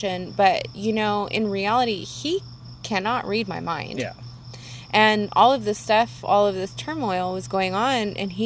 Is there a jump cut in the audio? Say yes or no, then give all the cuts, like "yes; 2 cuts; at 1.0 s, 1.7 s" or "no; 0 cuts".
no; 0 cuts